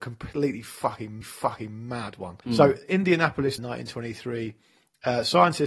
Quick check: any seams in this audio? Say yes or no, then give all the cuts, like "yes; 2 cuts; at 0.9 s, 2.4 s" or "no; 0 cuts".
yes; 3 cuts; at 1.2 s, 2.4 s, 3.6 s